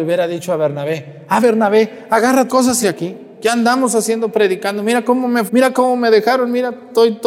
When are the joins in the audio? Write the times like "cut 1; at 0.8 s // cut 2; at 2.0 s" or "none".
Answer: cut 1; at 1.4 s // cut 2; at 2.5 s // cut 3; at 2.8 s // cut 4; at 5.5 s